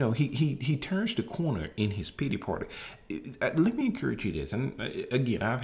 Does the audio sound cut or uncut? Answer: uncut